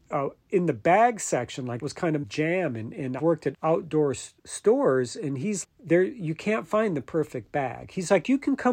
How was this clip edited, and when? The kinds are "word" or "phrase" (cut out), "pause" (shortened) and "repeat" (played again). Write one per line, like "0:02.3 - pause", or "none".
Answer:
0:01.8 - word
0:02.2 - word
0:03.2 - word
0:03.5 - word
0:04.4 - word
0:05.6 - word